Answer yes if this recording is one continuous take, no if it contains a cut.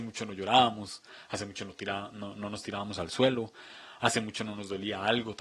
yes